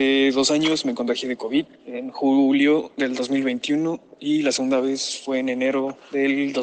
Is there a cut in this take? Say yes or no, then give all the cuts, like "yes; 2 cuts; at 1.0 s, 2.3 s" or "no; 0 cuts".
no; 0 cuts